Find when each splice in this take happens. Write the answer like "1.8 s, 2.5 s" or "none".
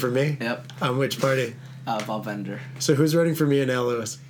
none

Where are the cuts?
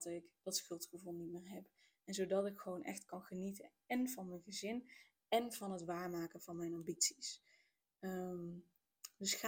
none

